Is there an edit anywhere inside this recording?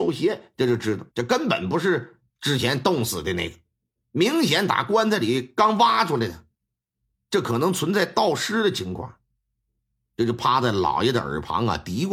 yes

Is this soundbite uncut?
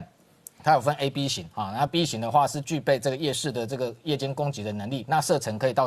yes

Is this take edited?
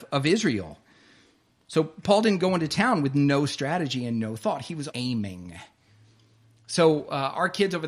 yes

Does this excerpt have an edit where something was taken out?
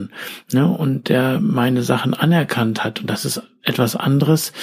no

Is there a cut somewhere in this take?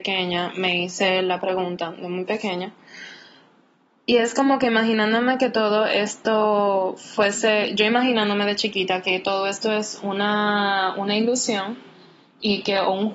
no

